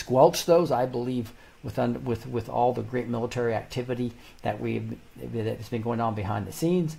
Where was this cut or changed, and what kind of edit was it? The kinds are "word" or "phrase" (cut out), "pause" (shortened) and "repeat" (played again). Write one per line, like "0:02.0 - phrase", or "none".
none

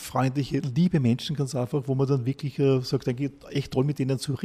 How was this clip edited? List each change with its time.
none

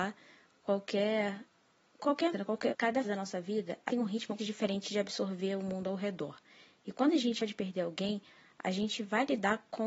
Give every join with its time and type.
0:02.3 - word
0:02.7 - word
0:03.0 - word
0:03.9 - word
0:04.4 - word
0:07.4 - word

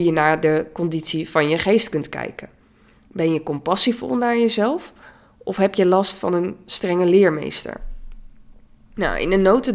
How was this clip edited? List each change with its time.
none

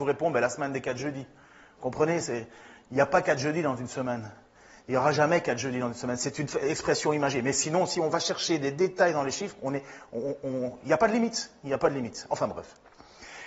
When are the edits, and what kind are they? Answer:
none

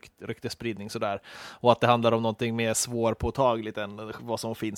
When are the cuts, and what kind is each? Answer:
none

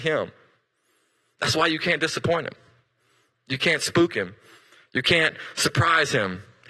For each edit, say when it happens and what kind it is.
none

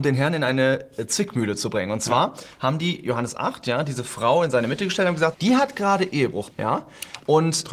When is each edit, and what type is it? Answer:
0:05.3 - word
0:06.5 - word

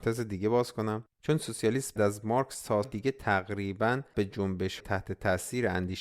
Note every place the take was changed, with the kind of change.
0:01.1 - pause
0:02.0 - word
0:02.8 - word
0:04.1 - word
0:04.8 - word

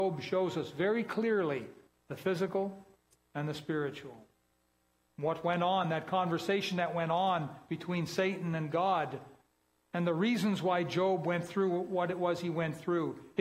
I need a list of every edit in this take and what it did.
none

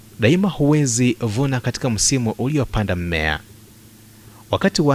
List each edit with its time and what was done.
none

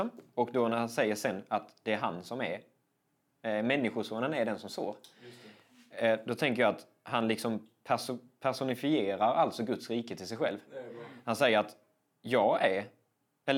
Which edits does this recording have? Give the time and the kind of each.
none

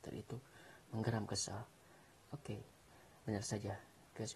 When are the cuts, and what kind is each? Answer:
0:02.4 - phrase

